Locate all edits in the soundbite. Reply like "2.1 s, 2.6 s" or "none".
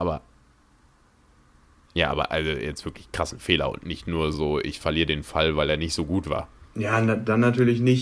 4.3 s